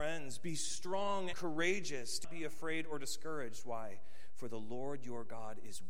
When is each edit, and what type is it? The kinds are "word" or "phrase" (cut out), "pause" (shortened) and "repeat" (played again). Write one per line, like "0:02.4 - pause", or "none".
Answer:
0:01.3 - word
0:02.2 - word